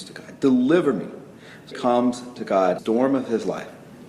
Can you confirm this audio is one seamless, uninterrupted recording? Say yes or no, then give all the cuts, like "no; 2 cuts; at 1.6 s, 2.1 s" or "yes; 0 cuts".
no; 2 cuts; at 1.7 s, 2.8 s